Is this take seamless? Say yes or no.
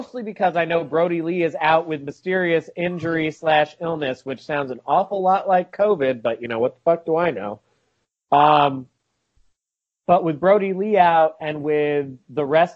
yes